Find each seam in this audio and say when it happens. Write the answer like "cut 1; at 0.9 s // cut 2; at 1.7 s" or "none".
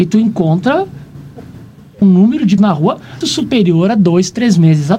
cut 1; at 2.0 s // cut 2; at 2.6 s // cut 3; at 3.2 s